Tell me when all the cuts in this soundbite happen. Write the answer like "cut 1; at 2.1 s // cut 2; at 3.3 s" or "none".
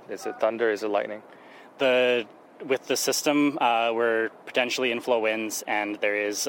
none

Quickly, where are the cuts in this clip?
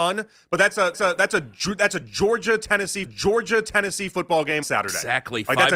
cut 1; at 0.9 s // cut 2; at 3.0 s // cut 3; at 4.6 s

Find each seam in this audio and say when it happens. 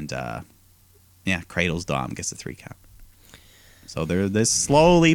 none

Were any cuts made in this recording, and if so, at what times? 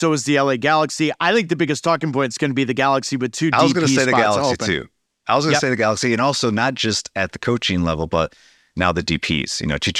none

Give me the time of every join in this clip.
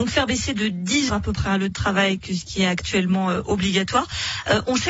cut 1; at 1.1 s // cut 2; at 1.7 s

